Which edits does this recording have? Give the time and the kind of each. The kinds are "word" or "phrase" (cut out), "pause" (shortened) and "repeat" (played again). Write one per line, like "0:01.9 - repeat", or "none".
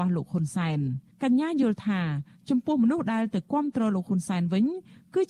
none